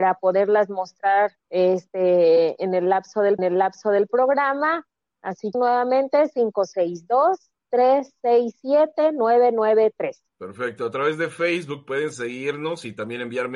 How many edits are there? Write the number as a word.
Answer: four